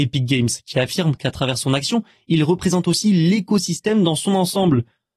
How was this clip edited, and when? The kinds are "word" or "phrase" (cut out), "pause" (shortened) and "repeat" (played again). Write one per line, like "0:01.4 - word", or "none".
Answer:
none